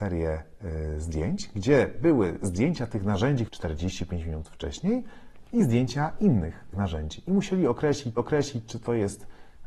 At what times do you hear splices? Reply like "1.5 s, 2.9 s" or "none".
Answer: 3.5 s, 6.7 s, 8.2 s